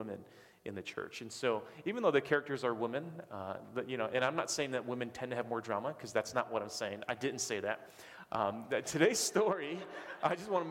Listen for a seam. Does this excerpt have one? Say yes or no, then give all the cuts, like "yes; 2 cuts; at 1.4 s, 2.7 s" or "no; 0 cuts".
no; 0 cuts